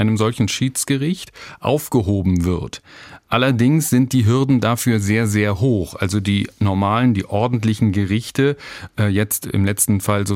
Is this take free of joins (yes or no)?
yes